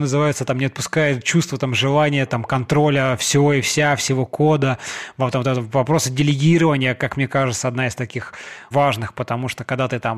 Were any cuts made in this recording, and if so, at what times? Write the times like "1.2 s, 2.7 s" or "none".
8.7 s